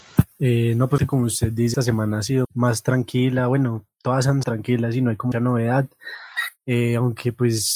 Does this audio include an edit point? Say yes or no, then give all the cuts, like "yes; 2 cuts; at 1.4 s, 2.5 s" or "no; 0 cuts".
yes; 5 cuts; at 1.0 s, 1.7 s, 2.4 s, 4.4 s, 5.3 s